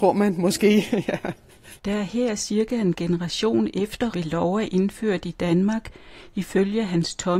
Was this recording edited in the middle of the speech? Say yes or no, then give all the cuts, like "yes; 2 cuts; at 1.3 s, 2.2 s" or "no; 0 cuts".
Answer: yes; 2 cuts; at 1.8 s, 4.1 s